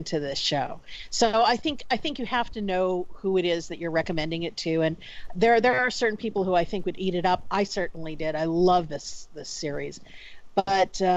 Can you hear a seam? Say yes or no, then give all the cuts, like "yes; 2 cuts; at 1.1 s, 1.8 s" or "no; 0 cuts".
no; 0 cuts